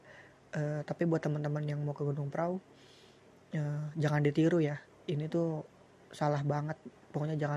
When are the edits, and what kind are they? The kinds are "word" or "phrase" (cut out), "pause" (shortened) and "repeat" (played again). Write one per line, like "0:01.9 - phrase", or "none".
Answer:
none